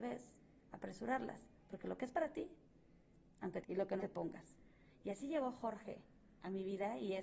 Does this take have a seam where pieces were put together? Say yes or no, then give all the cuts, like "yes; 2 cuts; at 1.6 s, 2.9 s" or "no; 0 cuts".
yes; 2 cuts; at 3.6 s, 4.0 s